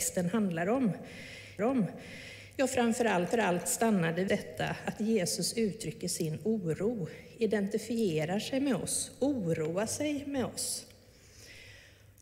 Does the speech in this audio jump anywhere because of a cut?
yes; 3 cuts; at 1.6 s, 3.3 s, 4.3 s

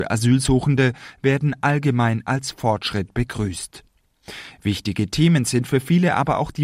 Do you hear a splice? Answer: no; 0 cuts

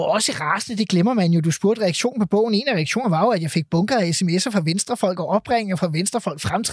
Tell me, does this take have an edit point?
no; 0 cuts

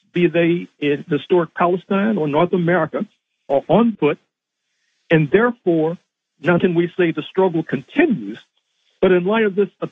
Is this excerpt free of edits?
no; 3 cuts; at 1.1 s, 3.9 s, 6.6 s

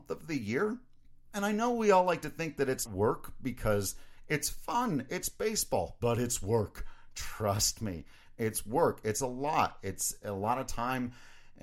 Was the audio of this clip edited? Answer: yes; 1 cut; at 2.9 s

